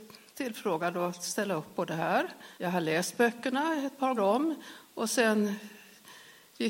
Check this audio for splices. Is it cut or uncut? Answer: cut